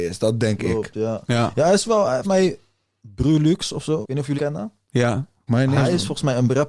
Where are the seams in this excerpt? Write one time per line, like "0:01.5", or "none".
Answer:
0:02.2
0:04.0
0:04.4
0:05.5